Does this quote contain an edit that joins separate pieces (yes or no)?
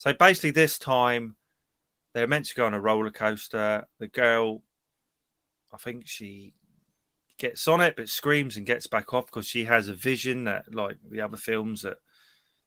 no